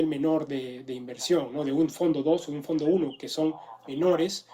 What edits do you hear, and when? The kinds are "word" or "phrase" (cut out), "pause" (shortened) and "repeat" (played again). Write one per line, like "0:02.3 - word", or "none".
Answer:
none